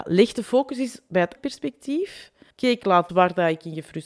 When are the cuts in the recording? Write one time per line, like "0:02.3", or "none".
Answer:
0:01.4
0:02.5
0:03.1